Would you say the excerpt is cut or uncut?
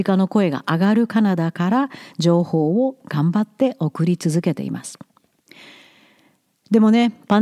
uncut